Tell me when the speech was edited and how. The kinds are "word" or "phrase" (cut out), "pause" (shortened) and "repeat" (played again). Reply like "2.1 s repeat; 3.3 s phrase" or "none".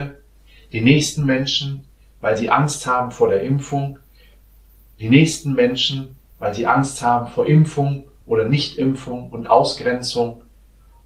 none